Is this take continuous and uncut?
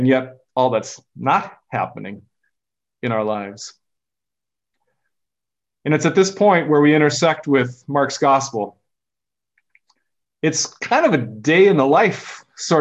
yes; 0 cuts

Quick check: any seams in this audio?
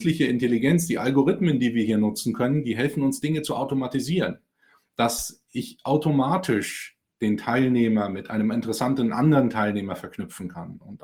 no; 0 cuts

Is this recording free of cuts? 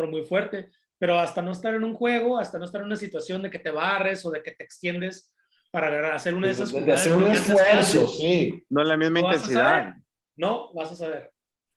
yes; 0 cuts

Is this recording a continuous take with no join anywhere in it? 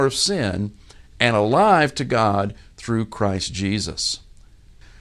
yes; 0 cuts

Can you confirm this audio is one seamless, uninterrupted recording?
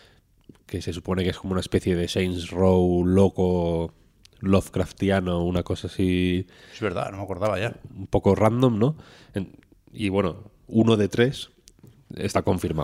yes; 0 cuts

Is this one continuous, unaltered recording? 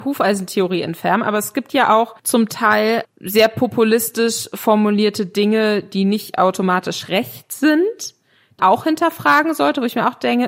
no; 3 cuts; at 2.2 s, 3.0 s, 8.6 s

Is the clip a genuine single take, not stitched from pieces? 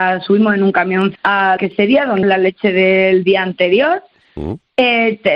no; 3 cuts; at 1.2 s, 1.6 s, 2.2 s

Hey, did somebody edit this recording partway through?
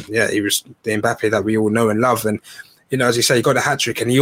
no; 0 cuts

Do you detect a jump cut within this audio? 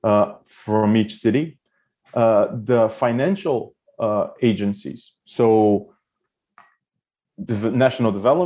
no; 0 cuts

